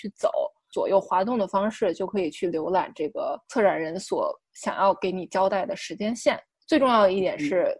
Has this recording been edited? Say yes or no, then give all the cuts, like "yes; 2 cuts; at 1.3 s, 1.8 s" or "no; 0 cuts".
yes; 1 cut; at 6.5 s